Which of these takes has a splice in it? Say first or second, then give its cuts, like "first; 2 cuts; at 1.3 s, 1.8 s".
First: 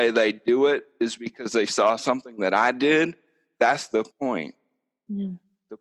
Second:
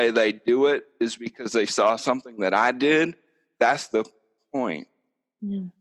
first; 1 cut; at 4.1 s